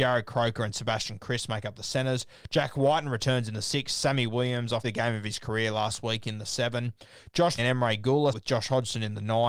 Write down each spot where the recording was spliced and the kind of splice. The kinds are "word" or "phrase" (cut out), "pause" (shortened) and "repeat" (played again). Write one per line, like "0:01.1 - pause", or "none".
0:04.8 - word
0:07.6 - word
0:08.3 - word